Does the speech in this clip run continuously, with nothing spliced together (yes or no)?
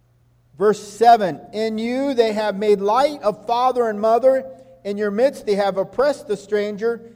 yes